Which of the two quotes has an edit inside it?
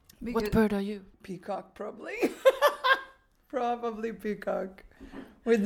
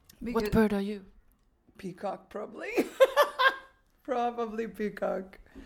first; 1 cut; at 1.1 s

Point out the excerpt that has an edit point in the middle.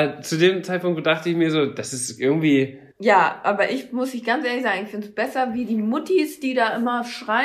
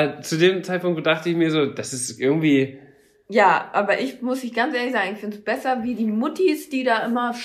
first; 1 cut; at 2.9 s

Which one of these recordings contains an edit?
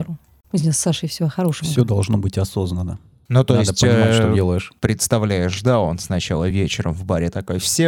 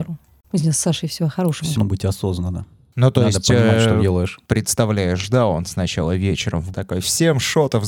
second; 2 cuts; at 1.8 s, 6.7 s

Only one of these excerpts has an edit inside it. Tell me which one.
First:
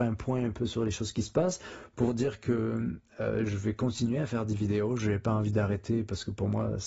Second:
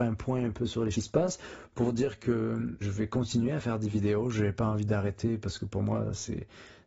second; 2 cuts; at 0.9 s, 2.8 s

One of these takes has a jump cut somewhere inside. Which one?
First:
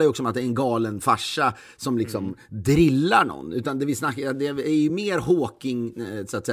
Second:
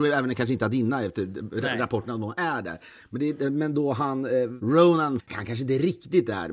second; 1 cut; at 5.2 s

